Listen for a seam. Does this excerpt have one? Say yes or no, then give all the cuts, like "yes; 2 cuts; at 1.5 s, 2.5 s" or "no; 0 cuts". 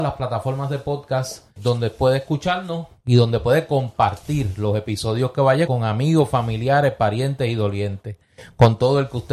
yes; 2 cuts; at 1.6 s, 5.7 s